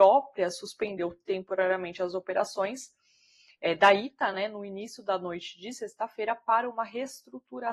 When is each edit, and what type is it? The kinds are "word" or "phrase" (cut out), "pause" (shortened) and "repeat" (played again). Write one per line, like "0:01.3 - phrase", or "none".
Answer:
none